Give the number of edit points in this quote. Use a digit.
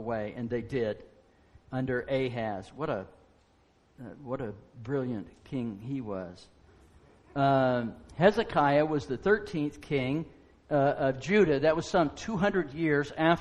0